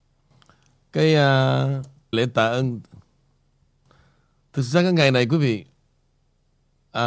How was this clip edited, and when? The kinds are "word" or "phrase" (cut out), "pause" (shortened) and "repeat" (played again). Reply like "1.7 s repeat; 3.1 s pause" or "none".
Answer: 2.1 s word